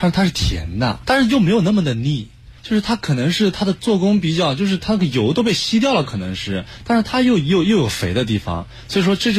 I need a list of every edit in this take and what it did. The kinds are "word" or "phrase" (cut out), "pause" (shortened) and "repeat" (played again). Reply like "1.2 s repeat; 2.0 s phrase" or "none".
1.0 s word; 2.6 s pause